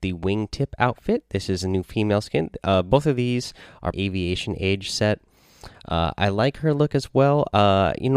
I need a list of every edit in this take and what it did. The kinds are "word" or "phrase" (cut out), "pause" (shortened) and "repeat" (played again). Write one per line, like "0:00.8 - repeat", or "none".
0:03.9 - phrase